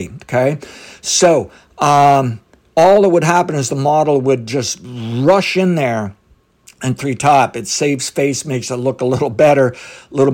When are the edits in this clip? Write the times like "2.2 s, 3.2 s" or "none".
7.0 s

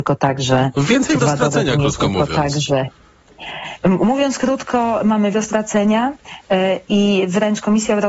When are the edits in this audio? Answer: 1.2 s, 3.8 s, 5.3 s

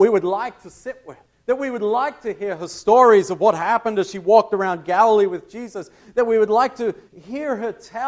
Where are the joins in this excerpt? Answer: 1.2 s, 7.1 s

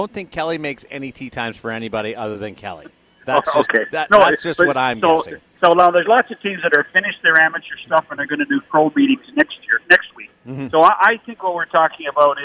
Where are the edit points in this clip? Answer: 3.0 s, 10.3 s

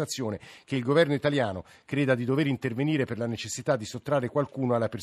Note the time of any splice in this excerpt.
none

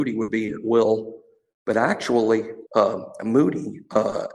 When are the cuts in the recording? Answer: 2.7 s

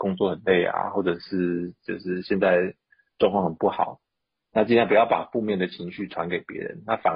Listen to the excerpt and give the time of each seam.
none

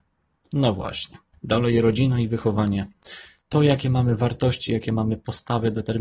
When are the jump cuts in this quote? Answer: none

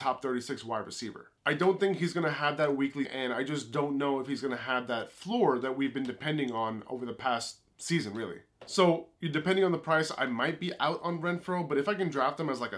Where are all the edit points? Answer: 3.1 s

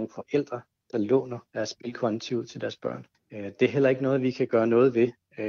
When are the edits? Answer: 1.5 s, 3.1 s

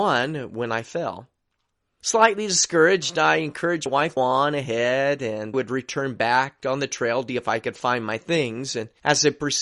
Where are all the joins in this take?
3.9 s, 4.2 s, 5.5 s, 7.3 s

